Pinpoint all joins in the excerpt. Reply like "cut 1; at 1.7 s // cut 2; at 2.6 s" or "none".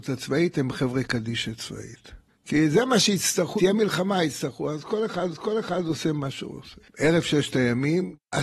cut 1; at 2.3 s // cut 2; at 3.6 s // cut 3; at 5.3 s // cut 4; at 6.8 s